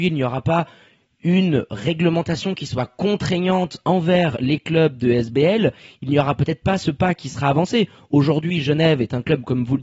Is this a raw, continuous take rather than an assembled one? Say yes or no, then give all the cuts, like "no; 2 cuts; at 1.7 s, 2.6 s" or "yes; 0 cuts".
yes; 0 cuts